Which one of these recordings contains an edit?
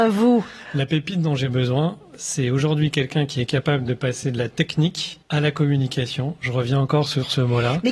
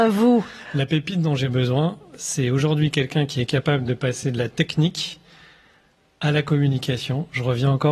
first; 1 cut; at 5.2 s

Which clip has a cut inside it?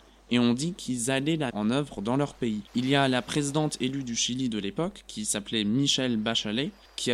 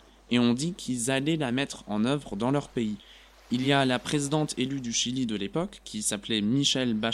first; 2 cuts; at 1.5 s, 2.7 s

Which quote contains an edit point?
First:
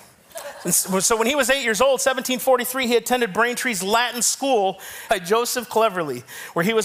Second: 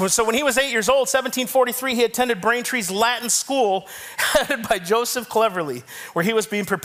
first; 1 cut; at 5.1 s

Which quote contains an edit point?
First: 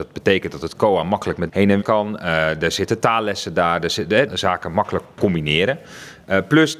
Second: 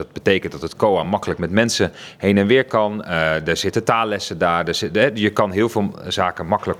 first; 3 cuts; at 1.5 s, 1.8 s, 4.3 s

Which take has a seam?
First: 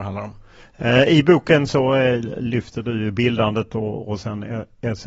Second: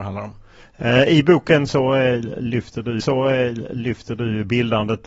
second; 1 cut; at 3.0 s

